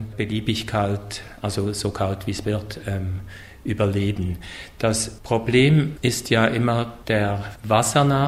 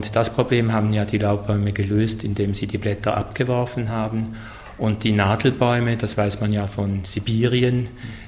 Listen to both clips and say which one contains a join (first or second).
first